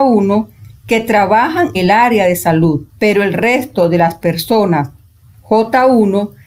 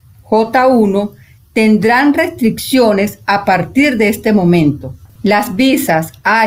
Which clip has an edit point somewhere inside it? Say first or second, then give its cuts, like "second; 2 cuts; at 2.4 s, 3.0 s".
first; 2 cuts; at 1.7 s, 2.9 s